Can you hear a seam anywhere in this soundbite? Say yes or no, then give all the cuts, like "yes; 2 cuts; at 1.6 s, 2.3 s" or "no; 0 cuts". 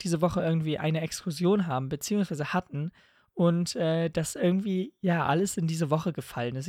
no; 0 cuts